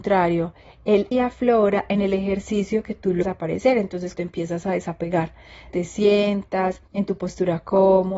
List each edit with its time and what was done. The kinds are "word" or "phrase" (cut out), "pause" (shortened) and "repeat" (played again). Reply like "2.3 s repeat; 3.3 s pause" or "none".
1.1 s word; 3.2 s word; 4.1 s word; 5.7 s word; 6.9 s pause